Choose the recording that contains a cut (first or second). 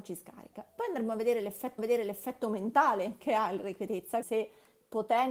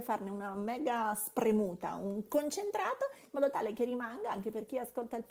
first